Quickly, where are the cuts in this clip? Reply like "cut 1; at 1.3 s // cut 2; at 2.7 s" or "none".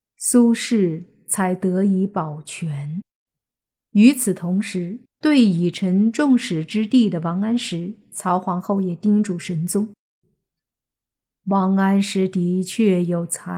cut 1; at 3.3 s // cut 2; at 5.1 s

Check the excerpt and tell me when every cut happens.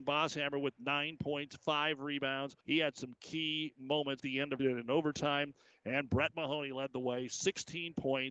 cut 1; at 2.6 s // cut 2; at 4.2 s // cut 3; at 4.6 s

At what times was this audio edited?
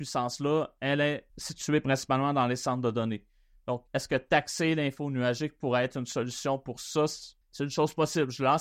cut 1; at 1.3 s // cut 2; at 3.9 s // cut 3; at 7.4 s

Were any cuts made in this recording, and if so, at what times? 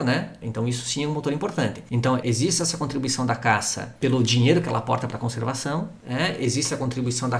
none

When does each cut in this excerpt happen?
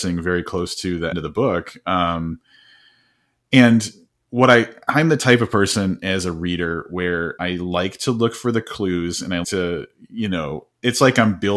cut 1; at 1.1 s // cut 2; at 7.4 s // cut 3; at 9.4 s

